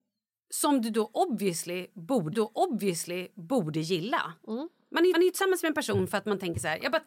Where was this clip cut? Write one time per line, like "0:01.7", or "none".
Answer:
0:02.3
0:05.1